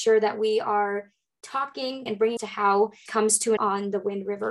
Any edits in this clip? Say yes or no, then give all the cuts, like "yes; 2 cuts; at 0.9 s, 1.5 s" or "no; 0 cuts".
yes; 4 cuts; at 2.1 s, 2.4 s, 3.1 s, 3.6 s